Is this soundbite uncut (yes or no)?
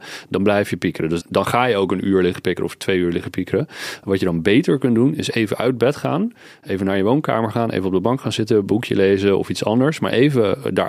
no